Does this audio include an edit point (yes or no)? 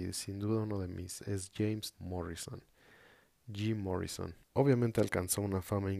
yes